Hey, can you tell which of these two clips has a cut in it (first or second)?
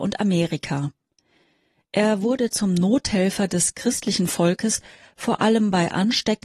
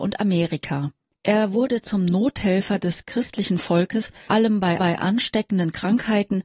second